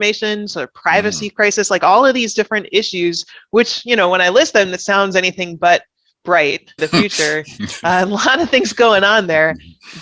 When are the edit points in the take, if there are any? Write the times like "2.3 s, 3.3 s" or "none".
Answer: 6.8 s